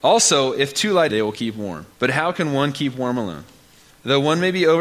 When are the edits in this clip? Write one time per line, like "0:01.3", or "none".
0:01.1
0:01.9